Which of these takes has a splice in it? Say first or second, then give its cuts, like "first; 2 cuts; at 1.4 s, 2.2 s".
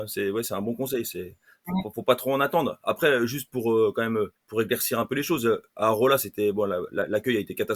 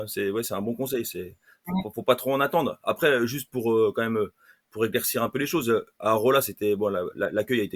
first; 1 cut; at 4.4 s